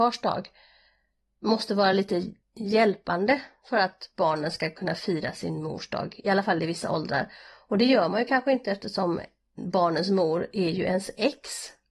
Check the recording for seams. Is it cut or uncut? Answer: uncut